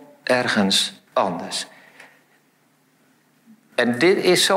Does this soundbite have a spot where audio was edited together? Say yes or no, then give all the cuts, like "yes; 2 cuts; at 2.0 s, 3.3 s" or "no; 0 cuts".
yes; 1 cut; at 1.1 s